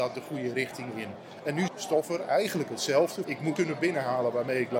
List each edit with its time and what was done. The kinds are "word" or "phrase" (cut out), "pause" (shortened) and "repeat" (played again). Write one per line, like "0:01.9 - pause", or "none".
0:01.7 - word
0:03.2 - word
0:03.6 - word